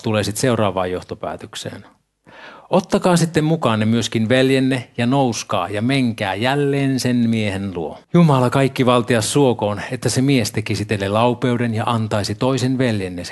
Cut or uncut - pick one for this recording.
cut